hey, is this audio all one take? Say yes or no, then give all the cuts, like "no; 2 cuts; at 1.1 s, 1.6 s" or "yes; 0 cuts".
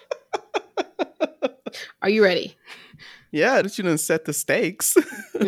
no; 1 cut; at 3.6 s